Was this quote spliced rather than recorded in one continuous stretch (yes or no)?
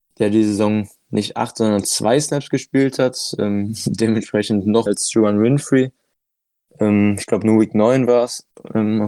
yes